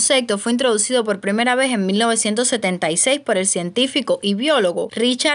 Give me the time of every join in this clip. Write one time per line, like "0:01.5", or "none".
none